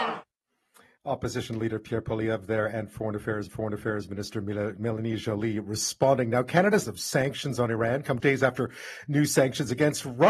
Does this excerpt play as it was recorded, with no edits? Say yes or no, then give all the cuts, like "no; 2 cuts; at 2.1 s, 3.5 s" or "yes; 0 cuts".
no; 3 cuts; at 3.5 s, 6.8 s, 8.2 s